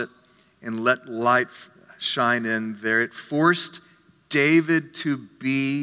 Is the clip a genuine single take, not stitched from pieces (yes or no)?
yes